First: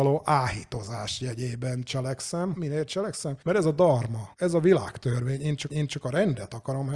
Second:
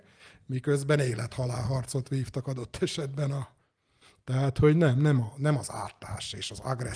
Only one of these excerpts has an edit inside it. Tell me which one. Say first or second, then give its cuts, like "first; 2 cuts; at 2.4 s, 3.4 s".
first; 4 cuts; at 2.5 s, 3.4 s, 4.3 s, 5.7 s